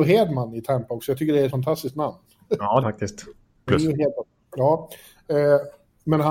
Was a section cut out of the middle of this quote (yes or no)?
yes